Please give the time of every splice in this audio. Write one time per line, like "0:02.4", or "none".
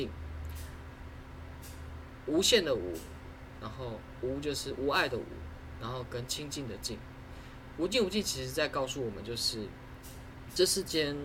0:03.6